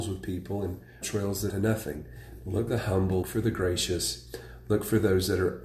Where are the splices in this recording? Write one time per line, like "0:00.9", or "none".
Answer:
0:01.0
0:01.5
0:02.7
0:03.2